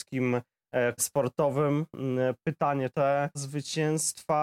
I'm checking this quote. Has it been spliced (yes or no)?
yes